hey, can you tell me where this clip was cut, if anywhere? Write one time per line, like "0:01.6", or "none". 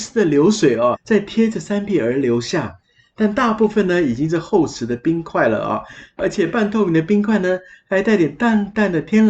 0:00.9